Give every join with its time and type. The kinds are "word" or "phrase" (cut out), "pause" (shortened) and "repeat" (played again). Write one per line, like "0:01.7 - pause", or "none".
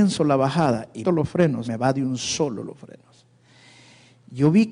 0:01.0 - word
0:01.6 - word